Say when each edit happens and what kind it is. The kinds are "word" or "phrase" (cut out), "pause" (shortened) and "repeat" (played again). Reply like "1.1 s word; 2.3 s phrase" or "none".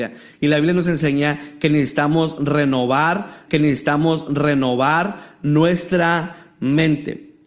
3.5 s repeat